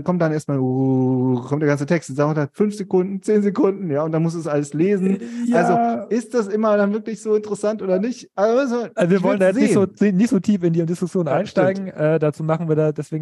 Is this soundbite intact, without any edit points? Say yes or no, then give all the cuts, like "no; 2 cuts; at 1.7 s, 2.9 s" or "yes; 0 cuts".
yes; 0 cuts